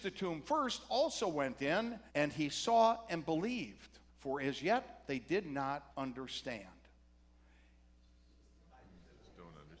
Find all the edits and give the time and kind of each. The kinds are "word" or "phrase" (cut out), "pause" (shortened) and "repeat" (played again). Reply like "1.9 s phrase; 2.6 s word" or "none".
2.1 s pause; 4.1 s pause; 5.9 s pause